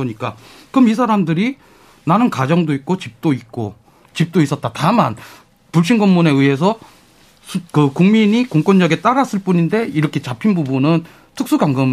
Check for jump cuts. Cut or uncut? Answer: uncut